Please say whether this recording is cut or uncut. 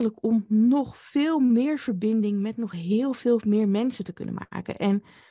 uncut